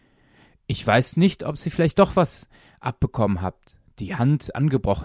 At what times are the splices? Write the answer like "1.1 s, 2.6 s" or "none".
none